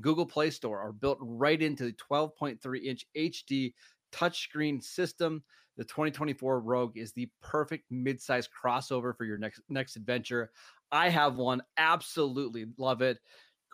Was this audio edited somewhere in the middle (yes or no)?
no